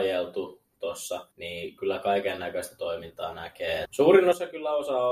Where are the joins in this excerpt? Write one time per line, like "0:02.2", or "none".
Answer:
0:01.3
0:03.9